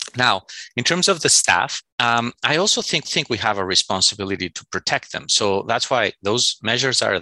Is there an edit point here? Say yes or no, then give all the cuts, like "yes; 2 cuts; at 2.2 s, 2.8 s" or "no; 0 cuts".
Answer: yes; 2 cuts; at 1.9 s, 3.0 s